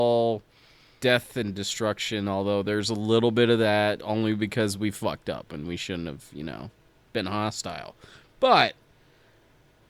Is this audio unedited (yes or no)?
yes